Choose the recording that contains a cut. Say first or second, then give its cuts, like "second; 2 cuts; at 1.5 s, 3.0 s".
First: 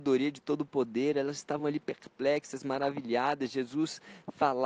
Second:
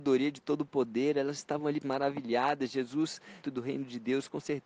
second; 2 cuts; at 1.8 s, 3.4 s